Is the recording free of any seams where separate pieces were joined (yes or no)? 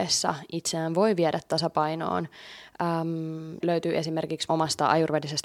no